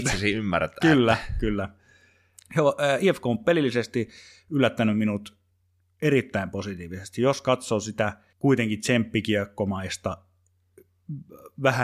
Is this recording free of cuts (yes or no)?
yes